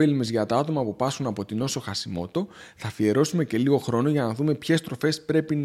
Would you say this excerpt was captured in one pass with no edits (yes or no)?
yes